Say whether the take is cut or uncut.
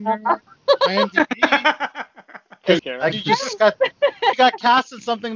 cut